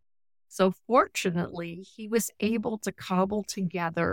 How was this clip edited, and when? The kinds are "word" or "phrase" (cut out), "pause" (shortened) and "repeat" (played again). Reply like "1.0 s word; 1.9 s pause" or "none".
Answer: none